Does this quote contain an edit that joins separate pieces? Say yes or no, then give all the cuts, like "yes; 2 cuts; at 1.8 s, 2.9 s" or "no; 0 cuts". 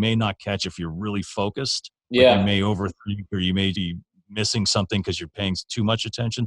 yes; 1 cut; at 3.7 s